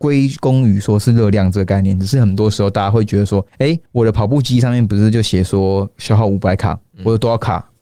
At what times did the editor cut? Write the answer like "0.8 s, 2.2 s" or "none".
3.5 s, 3.9 s

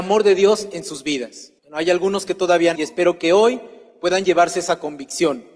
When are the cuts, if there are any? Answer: 1.6 s, 2.8 s

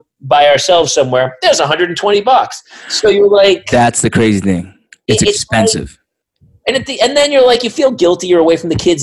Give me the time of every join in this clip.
none

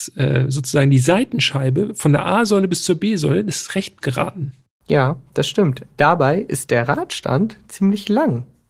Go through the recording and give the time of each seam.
4.0 s

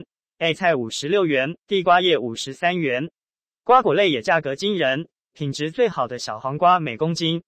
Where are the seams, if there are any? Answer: 1.6 s

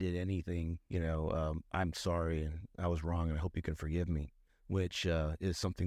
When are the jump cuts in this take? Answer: 4.5 s

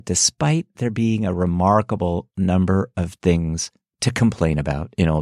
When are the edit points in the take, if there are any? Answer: none

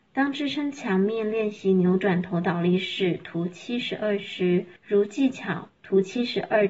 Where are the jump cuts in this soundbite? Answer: 4.8 s, 5.7 s

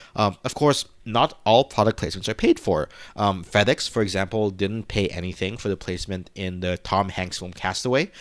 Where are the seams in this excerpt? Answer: none

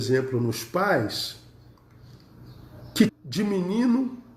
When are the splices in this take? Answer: 3.1 s

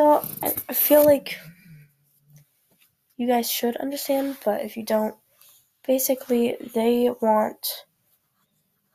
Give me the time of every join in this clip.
none

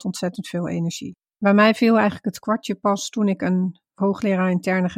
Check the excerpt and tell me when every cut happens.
1.3 s

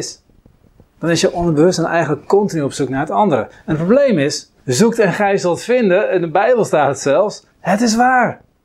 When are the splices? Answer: 4.6 s, 7.5 s

